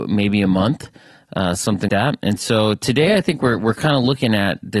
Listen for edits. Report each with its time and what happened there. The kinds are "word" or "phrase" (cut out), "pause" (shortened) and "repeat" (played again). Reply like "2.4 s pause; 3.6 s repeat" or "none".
1.9 s word